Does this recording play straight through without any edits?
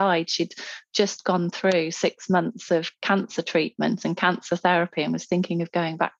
yes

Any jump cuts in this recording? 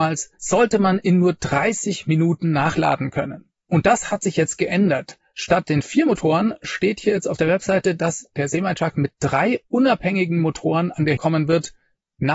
yes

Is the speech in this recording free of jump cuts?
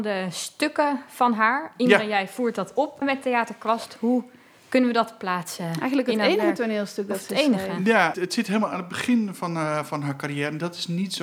no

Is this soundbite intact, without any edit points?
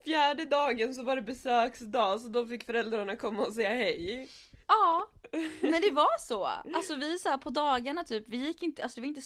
no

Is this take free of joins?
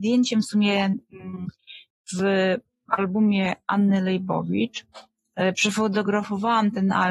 yes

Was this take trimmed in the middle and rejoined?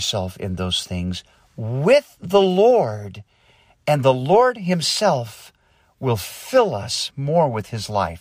no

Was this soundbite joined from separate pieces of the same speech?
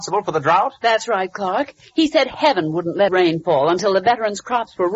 yes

